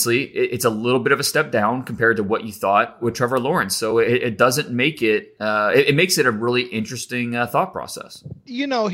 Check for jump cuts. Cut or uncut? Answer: uncut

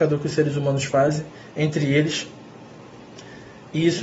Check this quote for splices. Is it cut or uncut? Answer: uncut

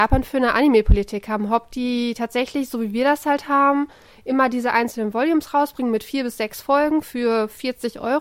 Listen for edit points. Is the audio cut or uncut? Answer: uncut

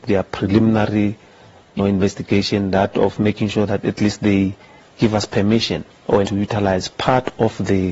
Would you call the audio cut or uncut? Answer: cut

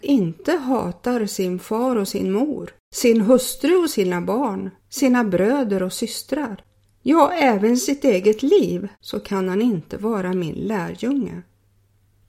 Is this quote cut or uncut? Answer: cut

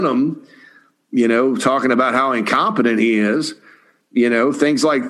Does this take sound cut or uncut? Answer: uncut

